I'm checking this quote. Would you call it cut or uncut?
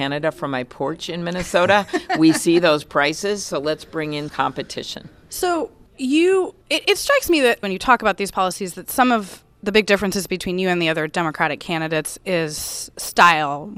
cut